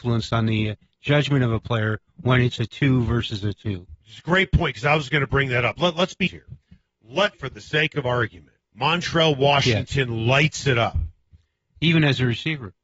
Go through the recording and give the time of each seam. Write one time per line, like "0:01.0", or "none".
0:06.3
0:07.3
0:08.6